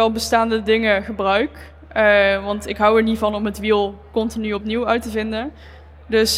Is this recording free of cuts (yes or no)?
yes